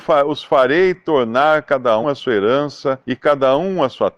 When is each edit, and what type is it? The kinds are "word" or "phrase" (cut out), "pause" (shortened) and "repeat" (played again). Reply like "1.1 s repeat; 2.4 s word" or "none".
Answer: 2.0 s word; 3.0 s pause